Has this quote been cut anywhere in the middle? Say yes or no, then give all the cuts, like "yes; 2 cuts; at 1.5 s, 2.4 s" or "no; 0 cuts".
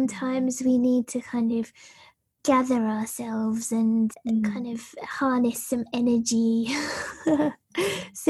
no; 0 cuts